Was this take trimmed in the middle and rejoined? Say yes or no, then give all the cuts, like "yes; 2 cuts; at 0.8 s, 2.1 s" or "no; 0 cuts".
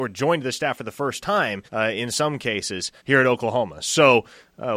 yes; 2 cuts; at 1.7 s, 3.0 s